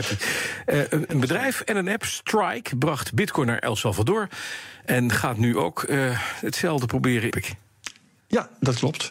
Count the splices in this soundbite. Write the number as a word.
one